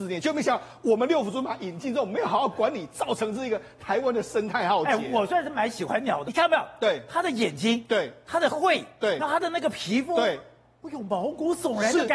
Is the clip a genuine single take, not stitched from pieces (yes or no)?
no